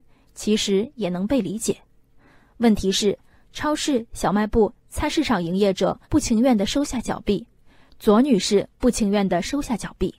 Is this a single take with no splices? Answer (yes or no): no